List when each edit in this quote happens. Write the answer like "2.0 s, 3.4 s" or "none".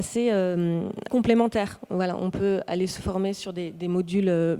1.1 s